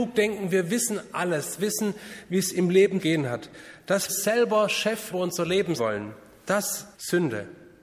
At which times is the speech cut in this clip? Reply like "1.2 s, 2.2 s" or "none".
1.6 s, 3.0 s, 4.1 s, 5.1 s, 5.8 s, 6.9 s